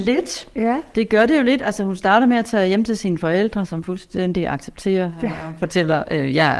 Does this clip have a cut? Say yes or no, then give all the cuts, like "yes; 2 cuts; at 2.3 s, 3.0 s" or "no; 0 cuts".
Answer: no; 0 cuts